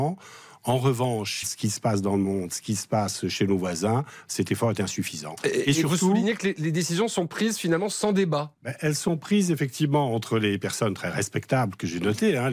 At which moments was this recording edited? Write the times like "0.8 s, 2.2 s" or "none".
1.4 s